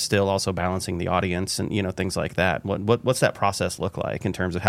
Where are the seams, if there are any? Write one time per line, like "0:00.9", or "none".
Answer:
none